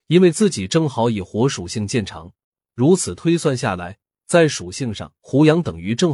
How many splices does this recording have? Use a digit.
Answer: 2